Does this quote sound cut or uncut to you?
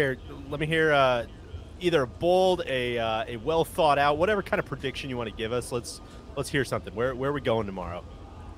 uncut